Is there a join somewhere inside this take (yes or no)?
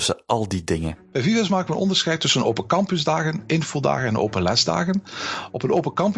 no